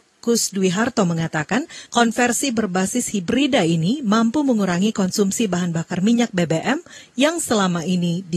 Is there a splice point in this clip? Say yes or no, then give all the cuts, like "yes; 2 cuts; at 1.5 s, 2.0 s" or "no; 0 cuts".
no; 0 cuts